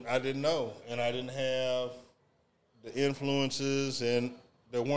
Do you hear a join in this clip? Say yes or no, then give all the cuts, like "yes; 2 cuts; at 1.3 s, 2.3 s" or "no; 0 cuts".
no; 0 cuts